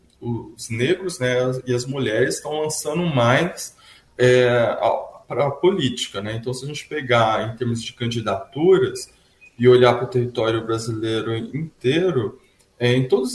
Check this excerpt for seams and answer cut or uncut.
uncut